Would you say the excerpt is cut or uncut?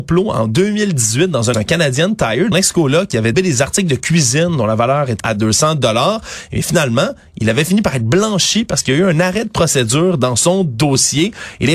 cut